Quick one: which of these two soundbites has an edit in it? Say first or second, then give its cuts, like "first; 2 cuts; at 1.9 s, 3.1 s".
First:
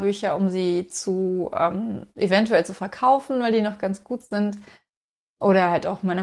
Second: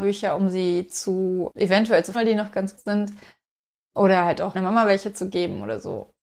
second; 4 cuts; at 1.5 s, 2.1 s, 2.8 s, 4.5 s